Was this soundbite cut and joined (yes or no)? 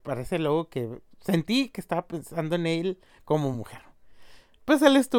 no